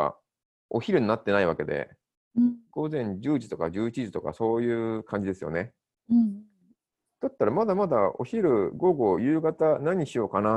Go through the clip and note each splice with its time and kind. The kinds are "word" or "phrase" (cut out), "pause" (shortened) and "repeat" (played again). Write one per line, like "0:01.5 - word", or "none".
0:02.7 - pause